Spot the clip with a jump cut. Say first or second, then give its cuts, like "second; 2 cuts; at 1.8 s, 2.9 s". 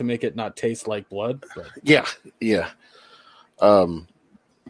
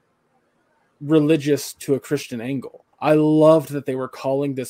second; 1 cut; at 2.9 s